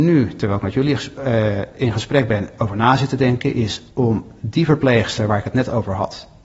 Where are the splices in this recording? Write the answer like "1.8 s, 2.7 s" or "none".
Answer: 3.9 s